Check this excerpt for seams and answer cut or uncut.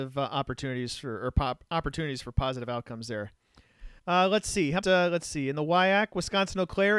cut